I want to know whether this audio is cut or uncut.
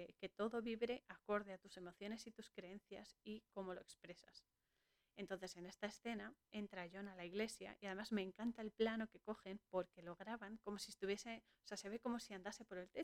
uncut